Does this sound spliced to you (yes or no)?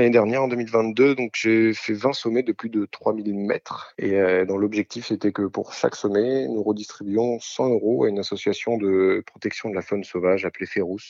no